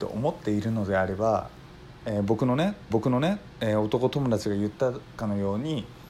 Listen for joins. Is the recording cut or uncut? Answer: cut